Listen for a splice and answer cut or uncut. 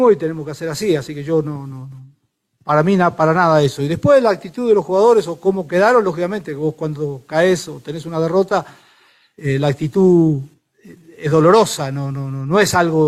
uncut